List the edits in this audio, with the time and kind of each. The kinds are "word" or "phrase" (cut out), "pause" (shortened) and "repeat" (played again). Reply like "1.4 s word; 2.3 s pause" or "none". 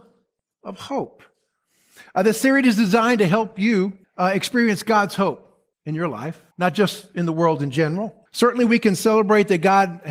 4.0 s pause; 5.7 s pause; 6.5 s pause; 8.3 s pause